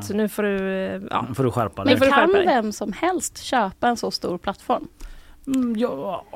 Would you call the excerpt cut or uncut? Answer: uncut